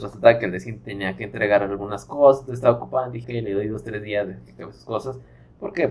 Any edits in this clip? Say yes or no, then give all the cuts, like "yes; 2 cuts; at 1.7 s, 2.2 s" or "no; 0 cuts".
yes; 1 cut; at 3.2 s